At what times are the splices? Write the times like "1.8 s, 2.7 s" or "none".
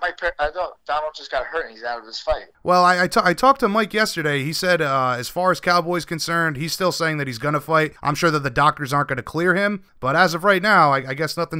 2.5 s, 8.0 s, 9.9 s